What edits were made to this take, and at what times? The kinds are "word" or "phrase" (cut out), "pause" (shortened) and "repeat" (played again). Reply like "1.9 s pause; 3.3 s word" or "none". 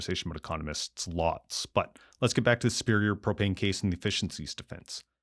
none